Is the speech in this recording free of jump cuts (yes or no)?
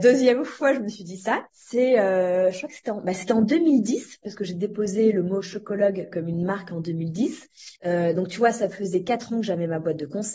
no